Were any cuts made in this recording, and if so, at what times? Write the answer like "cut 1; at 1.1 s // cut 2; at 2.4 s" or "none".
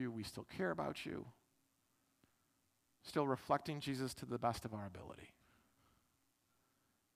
none